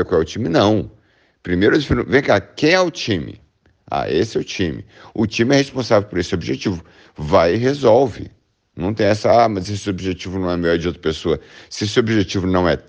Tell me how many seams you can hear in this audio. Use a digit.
0